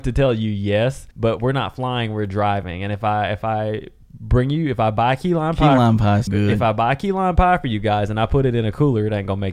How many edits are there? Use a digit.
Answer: 2